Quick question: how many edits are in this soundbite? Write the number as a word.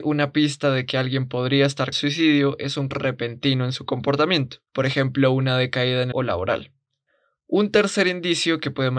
four